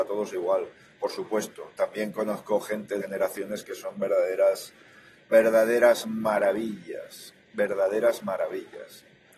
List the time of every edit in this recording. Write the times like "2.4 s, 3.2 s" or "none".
3.0 s

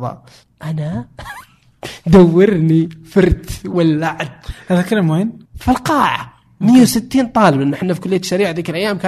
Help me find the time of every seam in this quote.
5.4 s

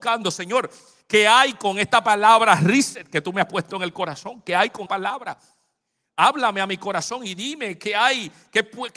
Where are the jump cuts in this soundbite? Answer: 4.9 s

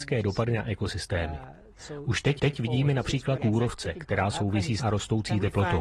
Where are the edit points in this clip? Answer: 2.4 s, 3.4 s, 4.8 s

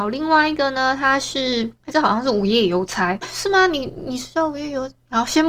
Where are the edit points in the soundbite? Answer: 3.2 s

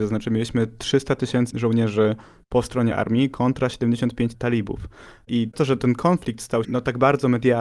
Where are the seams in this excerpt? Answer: 1.5 s, 2.9 s, 4.3 s, 5.5 s, 6.6 s

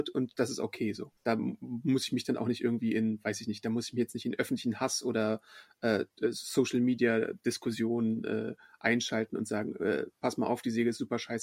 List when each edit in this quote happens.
1.2 s

